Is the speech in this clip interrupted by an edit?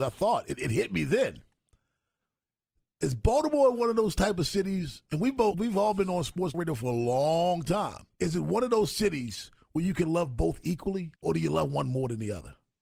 yes; 4 cuts; at 5.5 s, 6.5 s, 8.1 s, 11.2 s

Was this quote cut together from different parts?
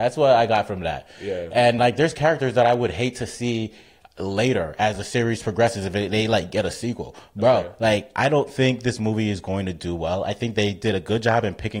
no; 0 cuts

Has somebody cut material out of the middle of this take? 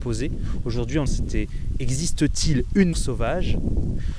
yes; 2 cuts; at 1.1 s, 2.9 s

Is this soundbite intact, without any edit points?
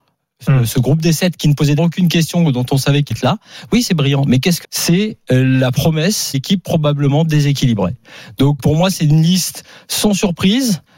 no; 5 cuts; at 1.8 s, 3.1 s, 4.6 s, 6.3 s, 8.6 s

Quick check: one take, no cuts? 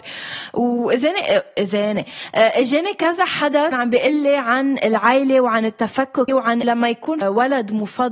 no; 4 cuts; at 3.7 s, 6.3 s, 6.6 s, 7.2 s

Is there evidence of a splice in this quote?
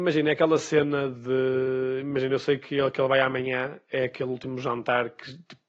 no; 0 cuts

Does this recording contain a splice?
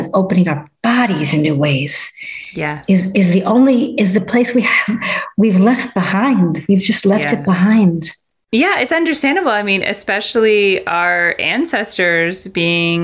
no; 0 cuts

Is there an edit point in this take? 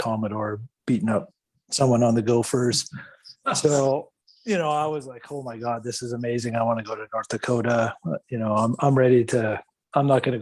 no; 0 cuts

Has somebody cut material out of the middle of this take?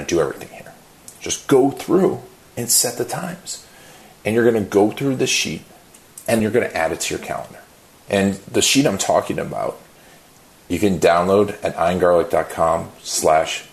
yes; 1 cut; at 6.4 s

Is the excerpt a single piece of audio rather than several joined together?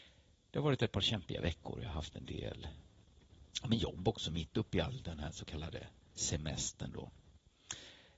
yes; 0 cuts

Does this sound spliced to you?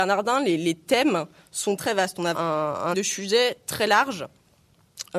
yes; 3 cuts; at 1.8 s, 2.3 s, 2.9 s

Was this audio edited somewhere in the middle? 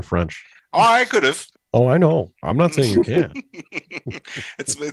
no; 0 cuts

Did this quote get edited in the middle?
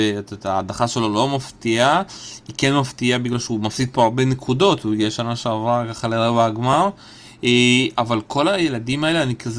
no; 0 cuts

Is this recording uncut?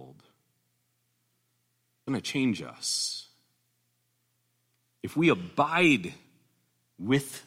no; 1 cut; at 2.1 s

